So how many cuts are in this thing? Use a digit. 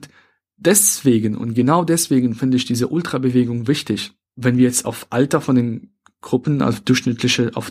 0